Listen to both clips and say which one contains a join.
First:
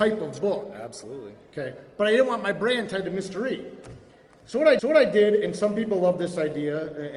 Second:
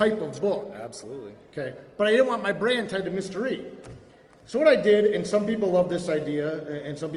first; 1 cut; at 4.8 s

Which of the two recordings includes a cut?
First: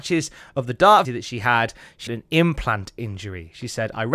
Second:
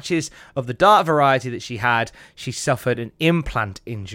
first; 2 cuts; at 1.0 s, 2.1 s

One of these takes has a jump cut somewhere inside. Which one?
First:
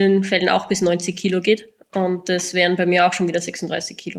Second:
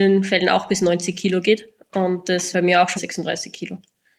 second; 2 cuts; at 2.5 s, 3.0 s

